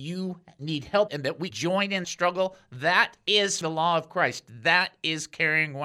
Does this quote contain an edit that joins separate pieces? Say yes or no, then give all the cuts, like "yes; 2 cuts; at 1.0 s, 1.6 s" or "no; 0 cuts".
yes; 4 cuts; at 1.1 s, 1.5 s, 2.0 s, 3.6 s